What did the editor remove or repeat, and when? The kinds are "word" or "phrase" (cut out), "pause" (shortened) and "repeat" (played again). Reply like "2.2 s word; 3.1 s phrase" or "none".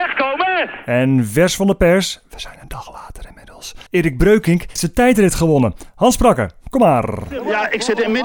3.9 s pause; 4.8 s word